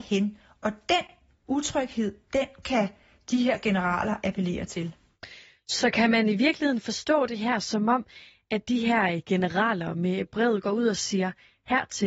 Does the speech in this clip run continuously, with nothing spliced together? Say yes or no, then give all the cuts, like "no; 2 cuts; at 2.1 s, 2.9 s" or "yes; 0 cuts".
yes; 0 cuts